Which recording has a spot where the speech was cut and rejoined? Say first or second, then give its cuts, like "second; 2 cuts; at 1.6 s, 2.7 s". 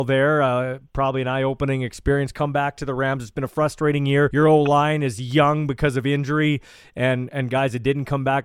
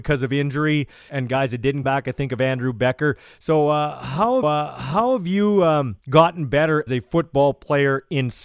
second; 5 cuts; at 1.1 s, 1.8 s, 4.4 s, 6.0 s, 6.9 s